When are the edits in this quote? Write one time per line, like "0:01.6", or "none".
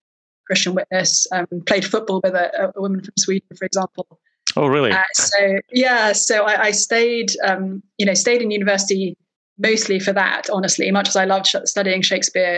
none